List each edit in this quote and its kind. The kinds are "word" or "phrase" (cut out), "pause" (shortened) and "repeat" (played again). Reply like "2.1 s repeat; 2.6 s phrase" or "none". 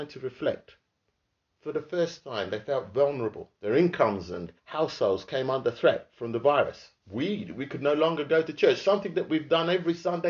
3.6 s pause; 4.6 s pause; 7.0 s pause